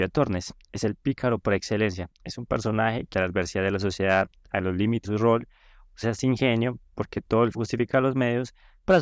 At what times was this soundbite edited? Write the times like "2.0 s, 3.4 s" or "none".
3.1 s, 5.0 s, 6.0 s, 7.5 s